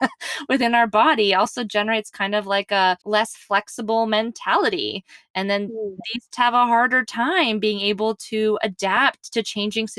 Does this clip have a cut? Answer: yes; 2 cuts; at 3.0 s, 6.3 s

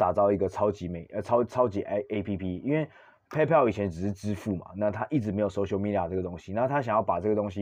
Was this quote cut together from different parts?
no; 0 cuts

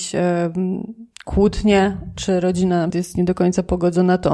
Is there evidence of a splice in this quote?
yes; 1 cut; at 2.9 s

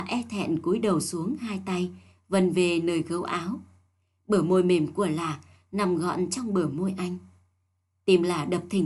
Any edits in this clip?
no; 0 cuts

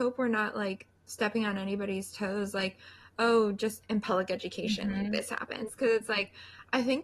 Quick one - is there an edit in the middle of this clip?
no; 0 cuts

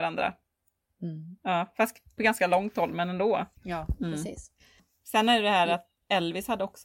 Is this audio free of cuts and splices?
no; 2 cuts; at 2.2 s, 3.6 s

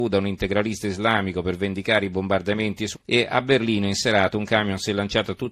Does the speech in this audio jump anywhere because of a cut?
yes; 1 cut; at 2.9 s

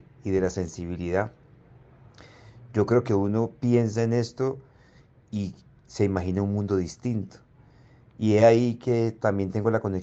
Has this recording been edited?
no; 0 cuts

